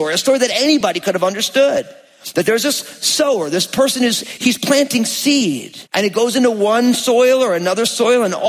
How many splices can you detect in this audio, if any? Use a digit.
1